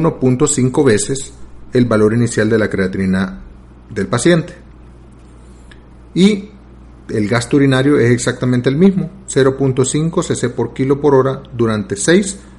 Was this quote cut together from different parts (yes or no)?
no